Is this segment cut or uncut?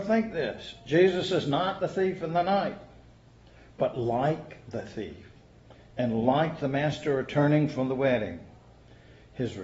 uncut